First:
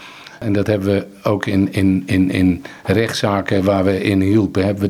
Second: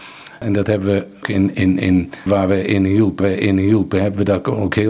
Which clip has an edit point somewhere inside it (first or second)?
second